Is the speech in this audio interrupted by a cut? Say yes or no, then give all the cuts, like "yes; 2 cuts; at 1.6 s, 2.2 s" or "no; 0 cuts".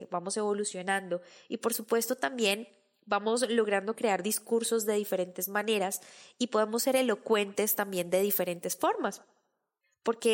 no; 0 cuts